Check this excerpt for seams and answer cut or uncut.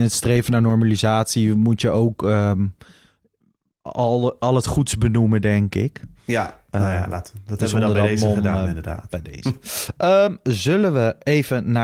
uncut